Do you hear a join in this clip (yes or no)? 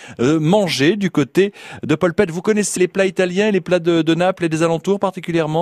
yes